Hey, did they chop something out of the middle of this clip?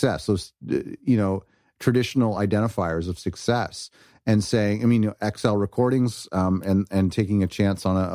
no; 0 cuts

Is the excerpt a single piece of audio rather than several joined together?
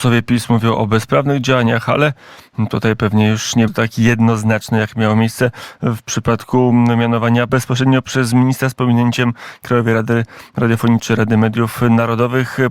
no; 3 cuts; at 3.7 s, 7.5 s, 11.0 s

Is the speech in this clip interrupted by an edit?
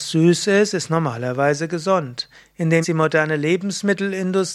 yes; 1 cut; at 2.8 s

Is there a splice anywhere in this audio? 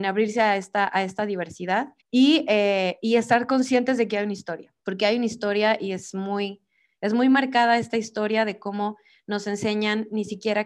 yes; 2 cuts; at 2.0 s, 4.8 s

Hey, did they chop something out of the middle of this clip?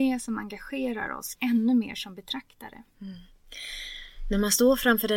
yes; 1 cut; at 1.3 s

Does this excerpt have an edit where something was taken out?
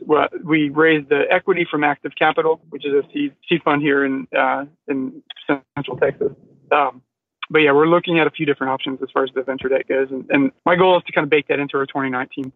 yes; 3 cuts; at 2.6 s, 6.4 s, 10.6 s

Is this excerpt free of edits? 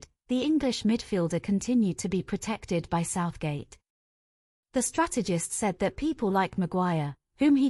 yes; 0 cuts

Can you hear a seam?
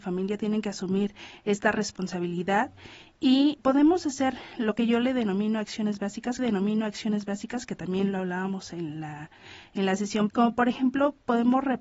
yes; 3 cuts; at 3.6 s, 6.4 s, 10.3 s

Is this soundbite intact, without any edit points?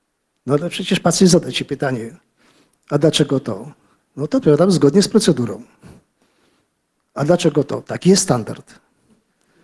yes; 0 cuts

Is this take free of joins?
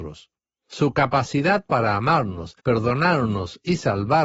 no; 1 cut; at 2.6 s

